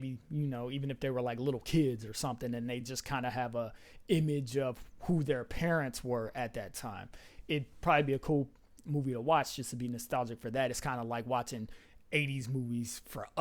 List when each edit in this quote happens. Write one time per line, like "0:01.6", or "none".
none